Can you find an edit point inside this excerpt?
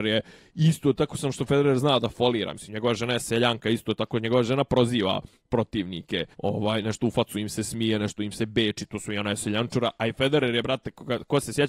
yes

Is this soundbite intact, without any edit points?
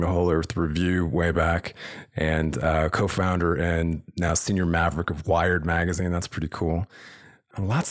yes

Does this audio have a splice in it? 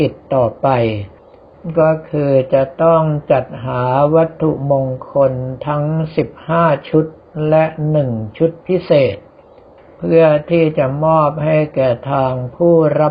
no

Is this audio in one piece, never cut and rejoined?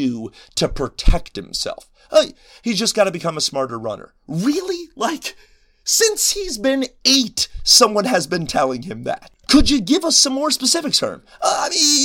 yes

